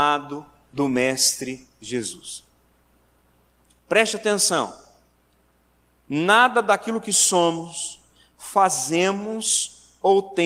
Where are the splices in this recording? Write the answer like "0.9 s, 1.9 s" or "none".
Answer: none